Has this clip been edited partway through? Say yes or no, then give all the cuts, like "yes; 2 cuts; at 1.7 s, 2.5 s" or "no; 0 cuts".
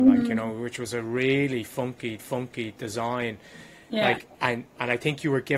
yes; 2 cuts; at 2.2 s, 4.3 s